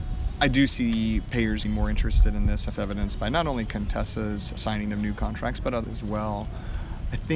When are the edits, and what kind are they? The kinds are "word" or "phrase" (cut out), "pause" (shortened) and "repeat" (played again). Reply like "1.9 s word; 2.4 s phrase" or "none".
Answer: 1.6 s word; 2.7 s word; 4.5 s word; 5.8 s word